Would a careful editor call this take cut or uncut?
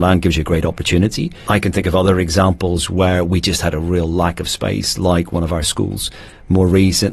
uncut